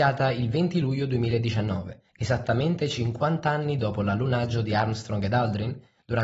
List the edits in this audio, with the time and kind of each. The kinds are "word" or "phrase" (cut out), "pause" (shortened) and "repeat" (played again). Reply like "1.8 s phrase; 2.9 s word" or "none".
2.1 s pause